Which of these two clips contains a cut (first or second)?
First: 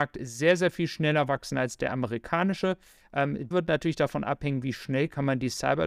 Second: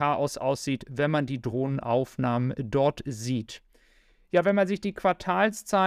first